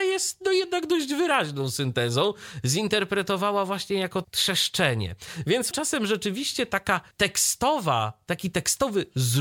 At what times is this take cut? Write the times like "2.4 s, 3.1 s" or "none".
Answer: 4.2 s, 5.7 s, 7.1 s